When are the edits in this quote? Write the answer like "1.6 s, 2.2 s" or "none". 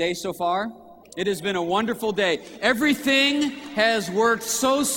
1.0 s